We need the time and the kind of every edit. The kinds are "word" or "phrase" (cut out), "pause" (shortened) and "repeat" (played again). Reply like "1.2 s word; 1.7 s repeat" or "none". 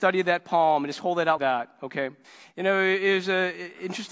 1.4 s word; 2.2 s pause